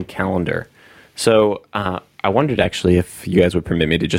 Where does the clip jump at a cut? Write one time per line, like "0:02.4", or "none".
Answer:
none

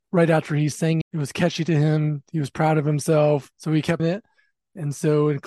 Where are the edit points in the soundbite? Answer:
0:01.0
0:03.5
0:04.0

